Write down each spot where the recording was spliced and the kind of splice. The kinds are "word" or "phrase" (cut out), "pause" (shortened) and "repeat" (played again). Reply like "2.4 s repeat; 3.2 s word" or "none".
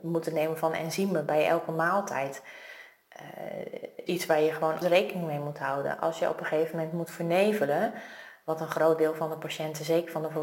4.1 s word; 4.8 s word